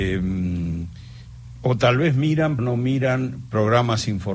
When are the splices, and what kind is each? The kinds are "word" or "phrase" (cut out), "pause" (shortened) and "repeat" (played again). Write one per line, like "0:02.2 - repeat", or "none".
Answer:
0:02.6 - word